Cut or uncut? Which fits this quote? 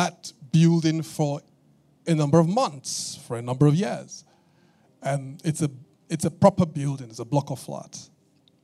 uncut